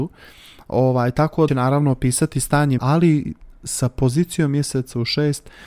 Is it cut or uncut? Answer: cut